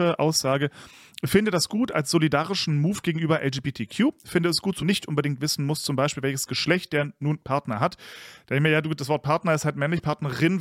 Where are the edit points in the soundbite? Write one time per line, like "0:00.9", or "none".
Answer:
0:04.8